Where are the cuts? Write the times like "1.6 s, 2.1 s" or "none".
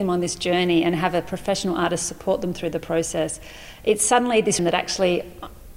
4.6 s